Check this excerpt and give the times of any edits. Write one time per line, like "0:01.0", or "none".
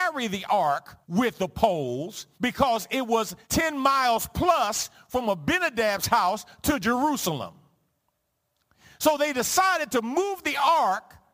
0:01.0
0:02.3
0:03.4